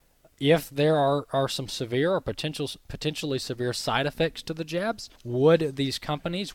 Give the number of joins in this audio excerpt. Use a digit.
1